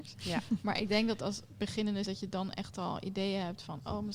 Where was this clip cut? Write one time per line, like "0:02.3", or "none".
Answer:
0:02.0